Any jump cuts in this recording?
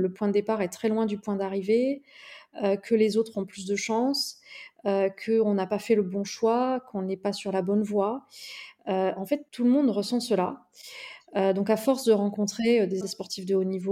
yes; 2 cuts; at 9.5 s, 13.0 s

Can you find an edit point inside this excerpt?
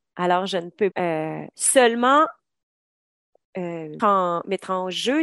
yes; 2 cuts; at 0.9 s, 4.0 s

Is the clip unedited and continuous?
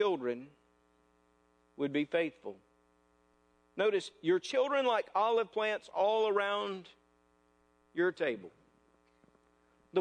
yes; 0 cuts

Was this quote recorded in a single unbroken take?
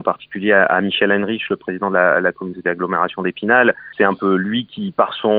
yes; 0 cuts

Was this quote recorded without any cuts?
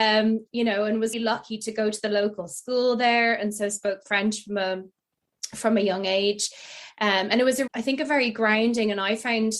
no; 2 cuts; at 1.1 s, 7.7 s

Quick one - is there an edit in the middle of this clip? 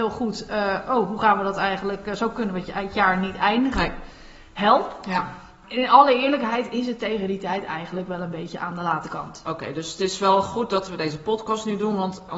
no; 0 cuts

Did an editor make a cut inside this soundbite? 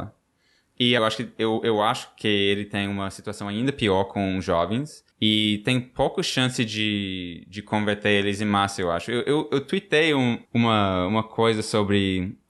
yes; 3 cuts; at 1.0 s, 5.1 s, 10.4 s

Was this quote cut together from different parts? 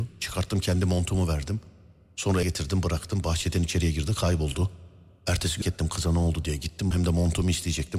yes; 3 cuts; at 2.4 s, 5.6 s, 6.9 s

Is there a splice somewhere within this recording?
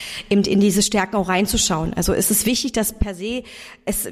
no; 0 cuts

